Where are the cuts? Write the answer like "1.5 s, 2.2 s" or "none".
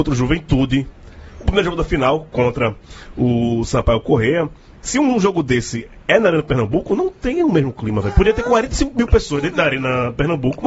none